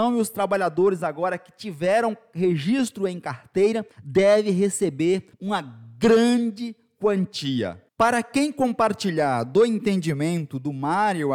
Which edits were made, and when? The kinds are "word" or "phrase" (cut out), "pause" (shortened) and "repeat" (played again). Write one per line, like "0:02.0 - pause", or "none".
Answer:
0:03.9 - pause
0:05.3 - pause
0:07.9 - pause